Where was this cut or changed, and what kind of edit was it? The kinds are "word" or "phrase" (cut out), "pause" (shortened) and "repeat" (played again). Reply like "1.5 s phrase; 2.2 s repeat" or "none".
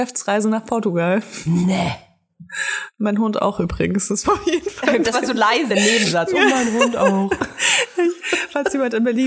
4.2 s word; 5.1 s word; 5.7 s word